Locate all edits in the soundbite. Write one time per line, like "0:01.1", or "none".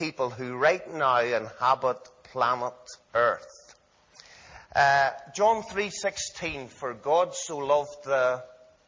0:03.0

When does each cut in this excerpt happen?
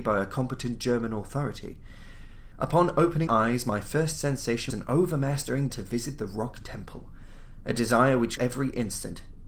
0:03.3
0:04.7
0:05.7
0:08.4

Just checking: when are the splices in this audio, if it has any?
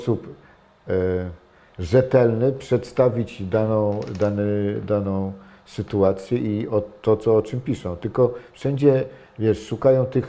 none

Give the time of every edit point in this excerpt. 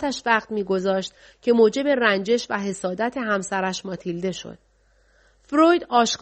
none

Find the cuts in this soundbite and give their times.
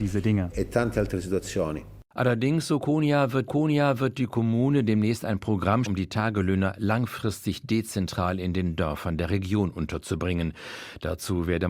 0:03.5
0:05.9

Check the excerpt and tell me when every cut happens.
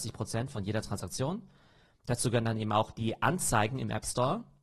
none

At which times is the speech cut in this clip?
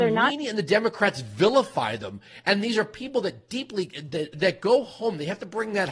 0:04.3

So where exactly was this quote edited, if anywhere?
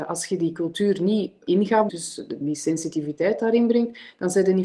0:01.5
0:01.9
0:02.4

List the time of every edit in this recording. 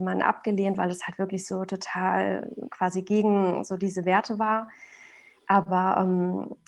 none

